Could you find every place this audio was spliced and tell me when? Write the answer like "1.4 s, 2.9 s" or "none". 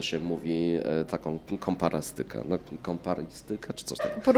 none